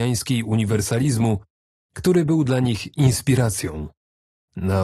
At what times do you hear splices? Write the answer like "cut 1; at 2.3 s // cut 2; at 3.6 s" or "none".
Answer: none